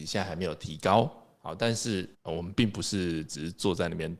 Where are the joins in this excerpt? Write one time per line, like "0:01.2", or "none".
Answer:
0:02.1